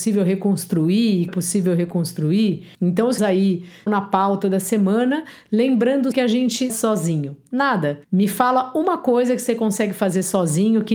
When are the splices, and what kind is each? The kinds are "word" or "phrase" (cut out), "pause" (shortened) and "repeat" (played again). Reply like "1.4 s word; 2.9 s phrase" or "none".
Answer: 1.3 s phrase; 2.7 s pause; 3.2 s word; 3.9 s word; 6.1 s word; 6.7 s phrase; 8.0 s pause